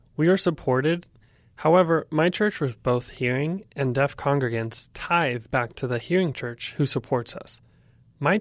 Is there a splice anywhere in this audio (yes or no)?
no